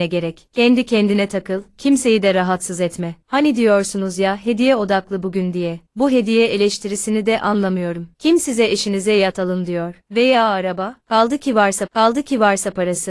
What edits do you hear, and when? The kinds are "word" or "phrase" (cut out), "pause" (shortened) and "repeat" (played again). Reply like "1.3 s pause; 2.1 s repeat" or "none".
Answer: 11.9 s repeat